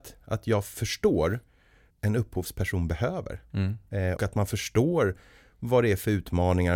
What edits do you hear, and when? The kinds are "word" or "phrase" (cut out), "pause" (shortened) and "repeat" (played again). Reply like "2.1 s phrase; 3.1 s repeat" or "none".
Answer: 1.9 s word; 4.2 s word

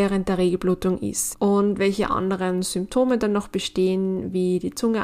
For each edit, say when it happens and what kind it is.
1.3 s word

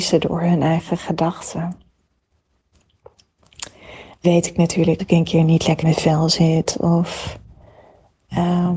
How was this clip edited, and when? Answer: 4.2 s word; 5.0 s word; 5.8 s word

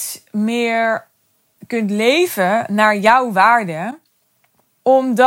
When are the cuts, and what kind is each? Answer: none

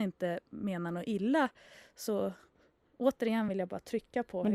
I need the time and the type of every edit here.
none

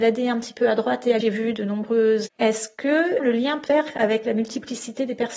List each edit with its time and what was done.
1.2 s word; 2.3 s word; 3.2 s word; 3.7 s word

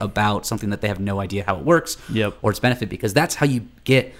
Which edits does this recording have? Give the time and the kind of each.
none

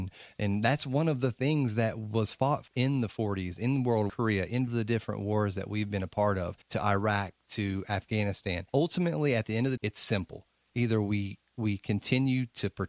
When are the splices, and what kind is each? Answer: 2.7 s word; 4.1 s phrase; 4.7 s phrase; 6.6 s pause; 8.7 s pause; 9.8 s word; 10.7 s word

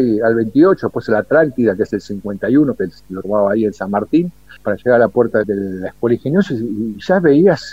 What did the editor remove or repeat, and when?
none

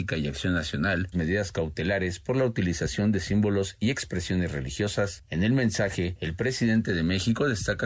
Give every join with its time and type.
1.1 s phrase

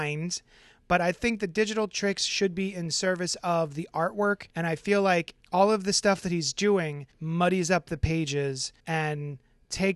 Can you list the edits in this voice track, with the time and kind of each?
4.5 s pause; 5.4 s pause; 7.1 s pause; 8.8 s pause

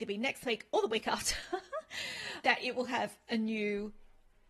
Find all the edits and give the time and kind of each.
2.4 s word

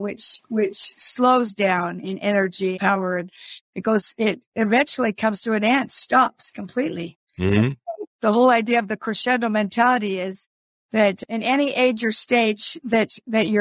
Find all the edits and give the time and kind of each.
2.8 s phrase; 7.3 s pause

